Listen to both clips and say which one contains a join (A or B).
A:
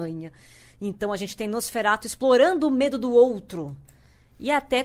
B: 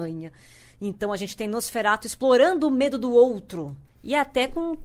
B